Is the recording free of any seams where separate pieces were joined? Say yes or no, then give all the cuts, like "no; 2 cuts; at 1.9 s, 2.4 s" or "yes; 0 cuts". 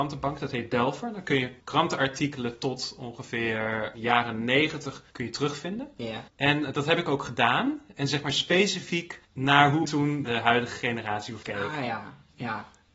no; 8 cuts; at 1.6 s, 3.9 s, 5.1 s, 6.3 s, 9.2 s, 9.9 s, 10.3 s, 11.4 s